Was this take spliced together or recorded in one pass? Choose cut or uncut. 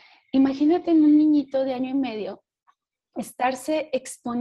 uncut